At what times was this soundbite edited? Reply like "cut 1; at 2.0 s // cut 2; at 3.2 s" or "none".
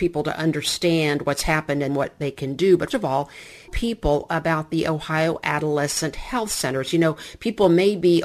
cut 1; at 1.9 s // cut 2; at 2.9 s // cut 3; at 3.7 s